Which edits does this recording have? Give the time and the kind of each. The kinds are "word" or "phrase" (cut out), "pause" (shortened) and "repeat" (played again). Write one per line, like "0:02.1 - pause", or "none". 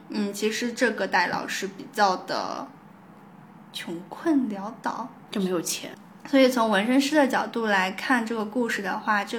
0:05.3 - pause